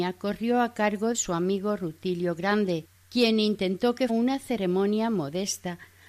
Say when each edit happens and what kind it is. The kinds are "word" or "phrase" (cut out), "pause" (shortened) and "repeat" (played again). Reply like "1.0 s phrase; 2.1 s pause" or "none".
1.1 s word; 2.9 s pause; 4.1 s word